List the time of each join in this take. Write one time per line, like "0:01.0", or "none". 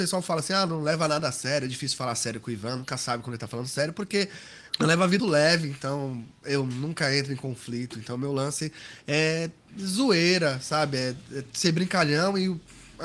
0:04.7
0:05.2